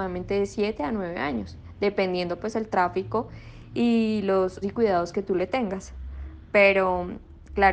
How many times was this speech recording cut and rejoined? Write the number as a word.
one